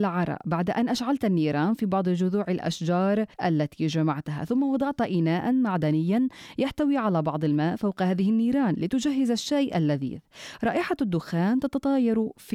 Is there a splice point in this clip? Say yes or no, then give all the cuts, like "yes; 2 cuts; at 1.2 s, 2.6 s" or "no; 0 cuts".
yes; 1 cut; at 3.3 s